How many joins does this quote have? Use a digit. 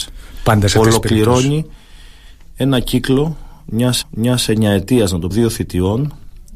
2